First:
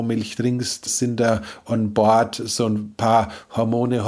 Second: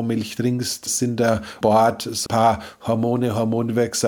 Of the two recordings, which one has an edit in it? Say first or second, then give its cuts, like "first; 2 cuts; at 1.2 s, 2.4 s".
second; 2 cuts; at 1.6 s, 2.3 s